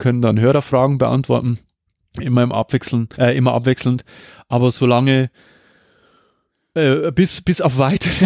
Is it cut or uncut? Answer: cut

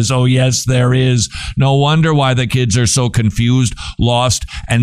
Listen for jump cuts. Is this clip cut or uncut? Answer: uncut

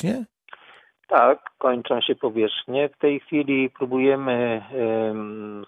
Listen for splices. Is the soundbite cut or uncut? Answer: uncut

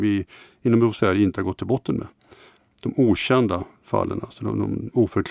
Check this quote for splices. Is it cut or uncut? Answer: uncut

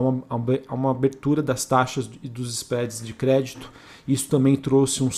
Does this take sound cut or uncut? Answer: uncut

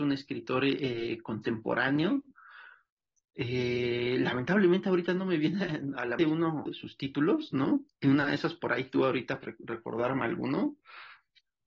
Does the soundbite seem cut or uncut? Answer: cut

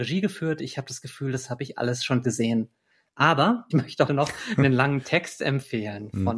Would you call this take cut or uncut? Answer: cut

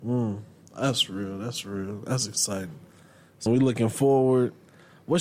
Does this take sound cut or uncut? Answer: cut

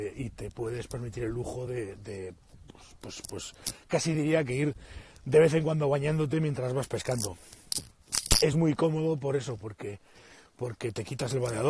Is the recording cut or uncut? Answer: uncut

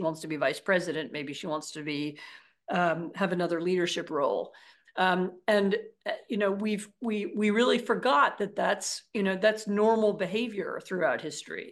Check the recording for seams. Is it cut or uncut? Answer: uncut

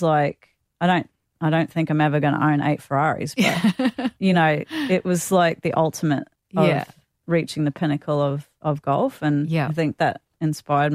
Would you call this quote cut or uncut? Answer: uncut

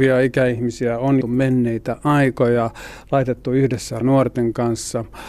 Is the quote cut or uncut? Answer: cut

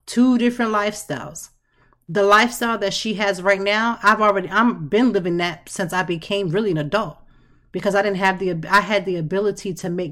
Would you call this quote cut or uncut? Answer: uncut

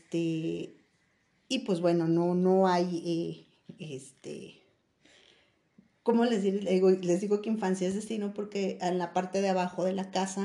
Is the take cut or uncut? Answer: uncut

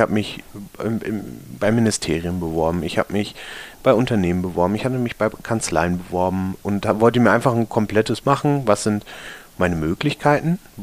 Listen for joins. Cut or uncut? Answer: cut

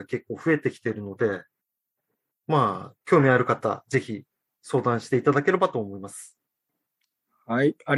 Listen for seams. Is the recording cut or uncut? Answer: uncut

